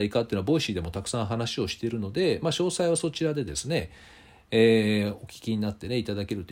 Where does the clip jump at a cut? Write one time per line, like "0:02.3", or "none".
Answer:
none